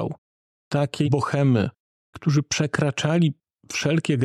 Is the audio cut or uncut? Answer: cut